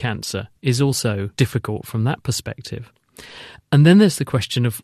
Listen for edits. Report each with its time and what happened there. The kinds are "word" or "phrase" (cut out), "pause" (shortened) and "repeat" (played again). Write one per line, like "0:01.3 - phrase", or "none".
0:01.3 - pause